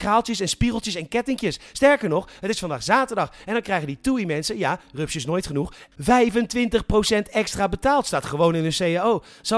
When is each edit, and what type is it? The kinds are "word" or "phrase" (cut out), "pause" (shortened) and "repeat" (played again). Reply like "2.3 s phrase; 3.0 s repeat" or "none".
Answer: none